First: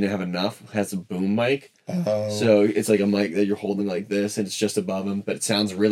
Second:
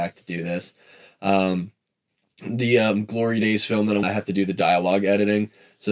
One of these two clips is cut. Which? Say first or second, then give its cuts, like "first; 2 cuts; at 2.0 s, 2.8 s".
second; 1 cut; at 4.0 s